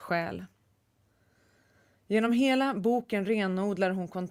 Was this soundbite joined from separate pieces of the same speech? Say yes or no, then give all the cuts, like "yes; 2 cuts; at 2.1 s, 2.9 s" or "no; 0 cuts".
no; 0 cuts